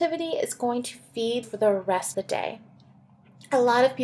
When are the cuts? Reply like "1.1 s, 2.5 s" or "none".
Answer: 1.4 s, 2.1 s